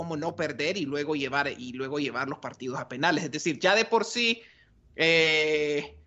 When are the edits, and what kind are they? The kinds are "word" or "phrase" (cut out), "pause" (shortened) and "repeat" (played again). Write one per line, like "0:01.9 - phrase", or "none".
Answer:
none